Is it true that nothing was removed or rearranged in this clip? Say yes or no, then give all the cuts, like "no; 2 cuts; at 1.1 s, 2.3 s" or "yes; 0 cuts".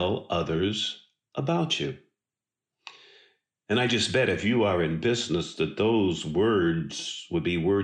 yes; 0 cuts